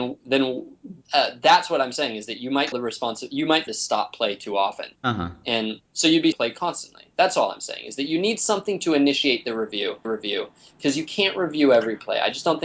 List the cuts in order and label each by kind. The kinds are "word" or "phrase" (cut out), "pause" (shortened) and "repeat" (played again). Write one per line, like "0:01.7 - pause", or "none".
0:01.0 - pause
0:02.7 - word
0:03.7 - phrase
0:05.0 - pause
0:06.3 - word
0:10.0 - repeat